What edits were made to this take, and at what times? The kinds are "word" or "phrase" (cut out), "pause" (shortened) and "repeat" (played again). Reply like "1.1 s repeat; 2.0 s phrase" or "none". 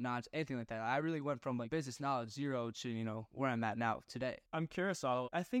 4.5 s pause